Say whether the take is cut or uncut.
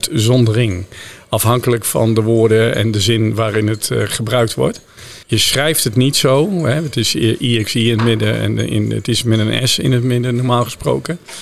cut